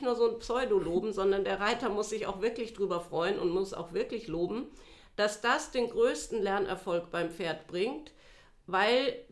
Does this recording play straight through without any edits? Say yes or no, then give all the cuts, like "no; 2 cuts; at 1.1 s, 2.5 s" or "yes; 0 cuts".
yes; 0 cuts